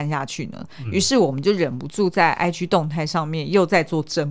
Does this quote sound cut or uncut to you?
uncut